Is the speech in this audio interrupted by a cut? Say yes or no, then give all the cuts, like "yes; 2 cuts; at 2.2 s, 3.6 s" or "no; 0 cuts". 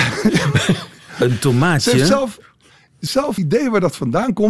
yes; 2 cuts; at 3.1 s, 3.4 s